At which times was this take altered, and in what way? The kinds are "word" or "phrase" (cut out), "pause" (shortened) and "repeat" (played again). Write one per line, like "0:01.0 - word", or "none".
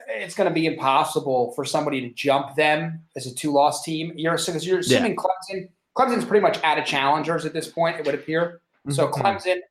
none